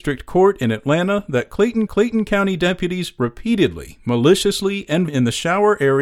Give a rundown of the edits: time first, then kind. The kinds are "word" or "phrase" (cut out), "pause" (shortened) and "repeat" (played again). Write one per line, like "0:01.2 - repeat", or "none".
0:01.9 - repeat
0:05.1 - phrase